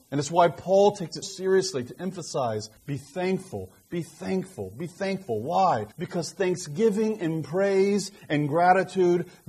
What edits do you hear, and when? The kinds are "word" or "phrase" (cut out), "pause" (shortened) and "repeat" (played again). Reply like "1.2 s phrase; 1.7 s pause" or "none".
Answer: 1.2 s word; 2.8 s pause; 5.9 s pause